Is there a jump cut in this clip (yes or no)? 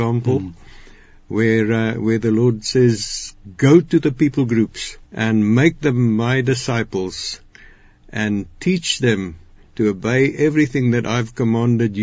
yes